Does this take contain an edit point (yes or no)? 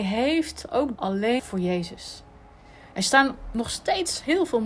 yes